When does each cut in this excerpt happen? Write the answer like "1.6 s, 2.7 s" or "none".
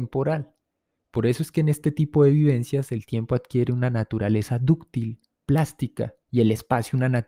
6.2 s